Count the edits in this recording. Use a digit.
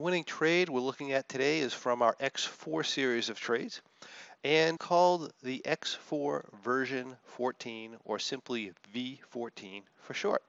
1